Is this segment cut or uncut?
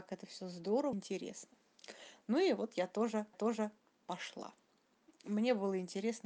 cut